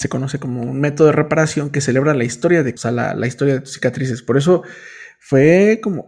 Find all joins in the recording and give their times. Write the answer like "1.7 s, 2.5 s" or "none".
2.8 s